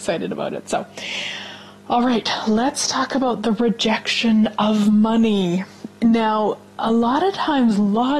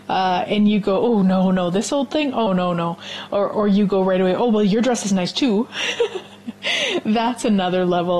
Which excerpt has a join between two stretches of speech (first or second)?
second